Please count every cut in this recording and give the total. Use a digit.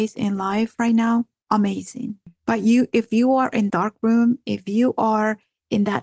1